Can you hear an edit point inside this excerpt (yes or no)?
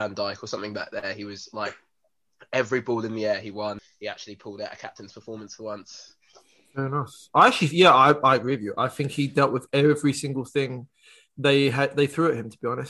no